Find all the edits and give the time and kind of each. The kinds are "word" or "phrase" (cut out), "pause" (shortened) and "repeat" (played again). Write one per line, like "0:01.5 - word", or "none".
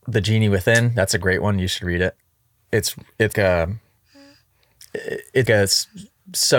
0:03.3 - word
0:05.5 - word